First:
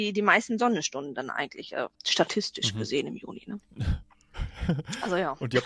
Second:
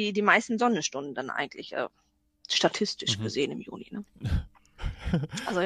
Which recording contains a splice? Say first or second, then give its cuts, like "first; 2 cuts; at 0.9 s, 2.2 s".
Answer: first; 1 cut; at 1.9 s